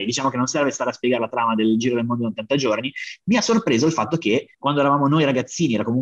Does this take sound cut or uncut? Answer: cut